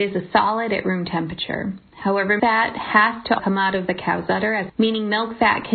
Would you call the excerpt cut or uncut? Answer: cut